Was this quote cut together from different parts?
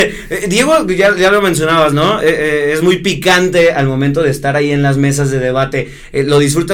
no; 0 cuts

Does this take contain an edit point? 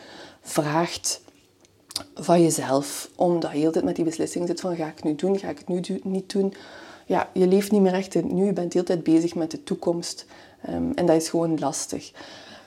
no; 0 cuts

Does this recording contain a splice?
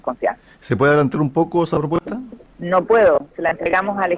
no; 0 cuts

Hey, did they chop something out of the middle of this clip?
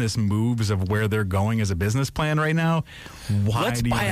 no; 0 cuts

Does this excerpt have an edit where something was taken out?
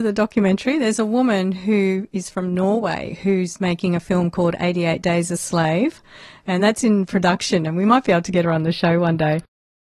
no; 0 cuts

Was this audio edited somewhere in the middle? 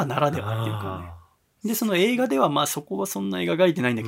yes; 1 cut; at 1.4 s

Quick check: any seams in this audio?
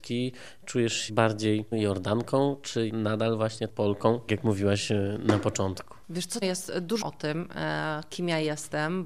yes; 7 cuts; at 1.1 s, 1.7 s, 2.9 s, 3.7 s, 4.3 s, 6.4 s, 7.0 s

